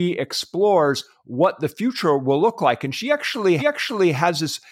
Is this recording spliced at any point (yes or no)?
yes